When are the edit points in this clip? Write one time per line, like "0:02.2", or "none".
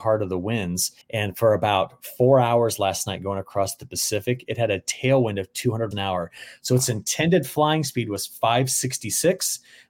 0:01.0
0:05.9